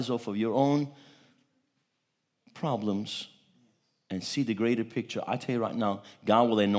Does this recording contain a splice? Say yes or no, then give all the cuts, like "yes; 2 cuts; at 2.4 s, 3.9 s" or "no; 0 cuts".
no; 0 cuts